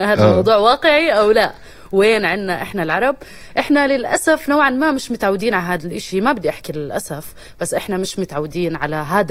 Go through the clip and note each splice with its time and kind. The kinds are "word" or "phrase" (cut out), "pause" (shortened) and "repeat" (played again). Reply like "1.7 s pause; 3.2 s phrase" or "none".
none